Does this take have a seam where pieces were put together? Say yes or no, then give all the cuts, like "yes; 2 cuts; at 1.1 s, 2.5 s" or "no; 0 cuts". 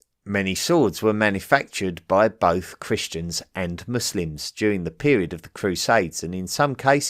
no; 0 cuts